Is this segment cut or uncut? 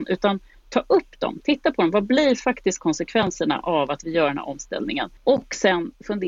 cut